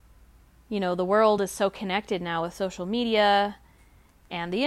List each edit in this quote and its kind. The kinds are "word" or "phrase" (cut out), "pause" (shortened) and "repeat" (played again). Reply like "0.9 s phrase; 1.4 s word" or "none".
none